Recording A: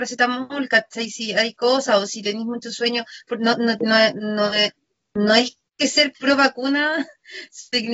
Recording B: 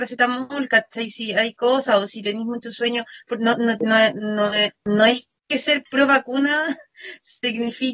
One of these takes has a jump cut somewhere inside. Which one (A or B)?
B